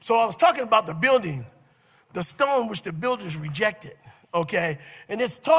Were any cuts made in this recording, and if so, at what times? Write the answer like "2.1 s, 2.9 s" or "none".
none